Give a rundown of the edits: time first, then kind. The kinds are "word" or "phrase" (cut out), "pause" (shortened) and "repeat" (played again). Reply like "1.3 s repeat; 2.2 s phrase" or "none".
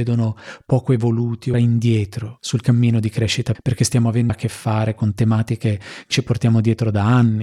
1.5 s word; 3.5 s word; 4.3 s word; 6.1 s word